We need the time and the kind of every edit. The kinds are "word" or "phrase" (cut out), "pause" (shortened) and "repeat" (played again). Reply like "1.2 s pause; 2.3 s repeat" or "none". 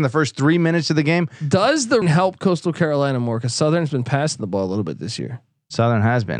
2.0 s word